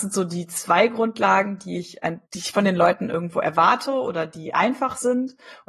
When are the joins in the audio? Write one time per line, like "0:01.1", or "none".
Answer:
0:02.3